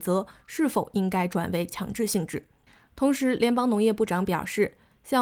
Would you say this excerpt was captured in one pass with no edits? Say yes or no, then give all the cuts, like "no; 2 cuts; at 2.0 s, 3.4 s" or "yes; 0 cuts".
no; 1 cut; at 2.7 s